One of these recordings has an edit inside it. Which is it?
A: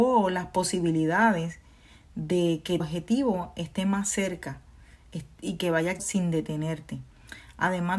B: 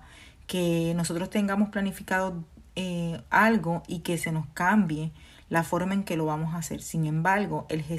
A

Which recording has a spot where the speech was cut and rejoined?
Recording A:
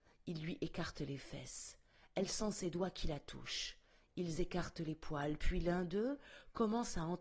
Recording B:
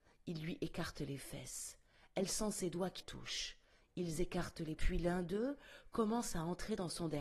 B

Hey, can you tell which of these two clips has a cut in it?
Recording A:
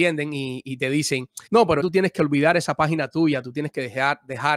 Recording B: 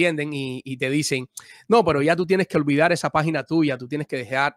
A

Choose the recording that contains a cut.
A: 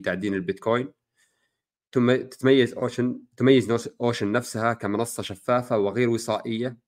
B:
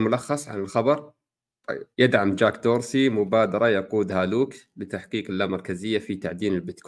B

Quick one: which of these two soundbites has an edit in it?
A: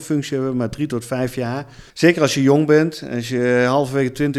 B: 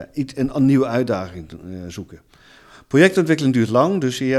A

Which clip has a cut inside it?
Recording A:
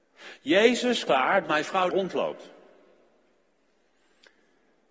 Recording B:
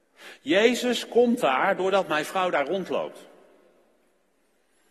A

